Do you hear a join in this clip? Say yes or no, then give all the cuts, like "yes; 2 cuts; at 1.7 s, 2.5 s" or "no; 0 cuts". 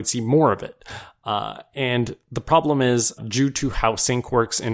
yes; 1 cut; at 3.2 s